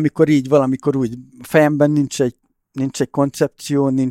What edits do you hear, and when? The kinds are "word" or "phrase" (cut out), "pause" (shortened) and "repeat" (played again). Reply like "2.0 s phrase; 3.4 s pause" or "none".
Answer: none